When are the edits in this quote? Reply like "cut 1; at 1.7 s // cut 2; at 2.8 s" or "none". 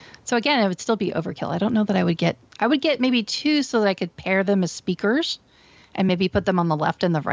none